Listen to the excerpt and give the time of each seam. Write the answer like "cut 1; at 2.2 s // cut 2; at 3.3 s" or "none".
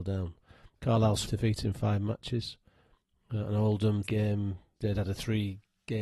cut 1; at 1.2 s // cut 2; at 4.0 s // cut 3; at 4.8 s